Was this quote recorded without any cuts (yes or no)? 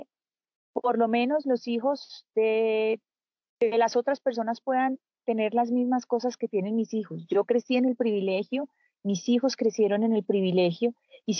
yes